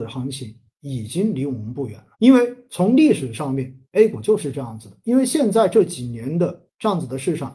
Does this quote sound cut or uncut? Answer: cut